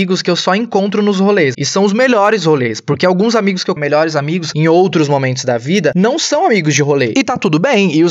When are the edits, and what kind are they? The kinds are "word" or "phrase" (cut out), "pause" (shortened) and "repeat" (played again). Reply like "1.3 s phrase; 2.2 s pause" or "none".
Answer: 1.5 s word; 3.8 s word